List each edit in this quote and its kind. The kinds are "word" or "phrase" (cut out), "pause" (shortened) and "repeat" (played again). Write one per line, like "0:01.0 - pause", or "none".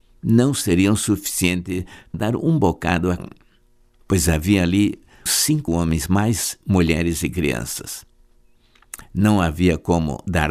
0:02.1 - word
0:03.2 - word
0:05.3 - word
0:05.7 - word